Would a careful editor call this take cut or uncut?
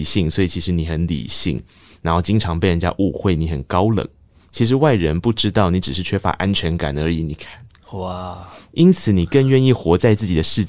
uncut